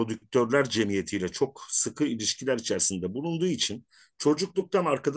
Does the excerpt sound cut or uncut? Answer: uncut